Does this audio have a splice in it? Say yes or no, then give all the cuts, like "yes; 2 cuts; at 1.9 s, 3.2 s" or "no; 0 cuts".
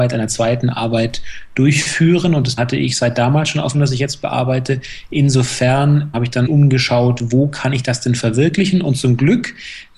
yes; 4 cuts; at 2.6 s, 3.7 s, 6.1 s, 6.5 s